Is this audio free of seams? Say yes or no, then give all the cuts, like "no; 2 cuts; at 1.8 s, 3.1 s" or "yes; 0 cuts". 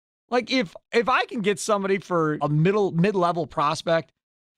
no; 1 cut; at 2.4 s